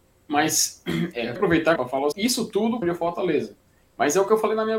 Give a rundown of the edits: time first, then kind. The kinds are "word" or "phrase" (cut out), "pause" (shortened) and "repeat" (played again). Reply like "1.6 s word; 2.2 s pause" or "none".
1.4 s phrase; 1.8 s word; 2.1 s phrase; 2.8 s word